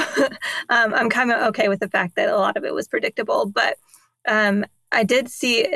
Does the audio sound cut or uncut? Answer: uncut